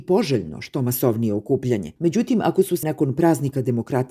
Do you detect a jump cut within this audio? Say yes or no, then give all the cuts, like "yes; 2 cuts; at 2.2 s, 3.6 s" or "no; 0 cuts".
yes; 2 cuts; at 2.0 s, 2.8 s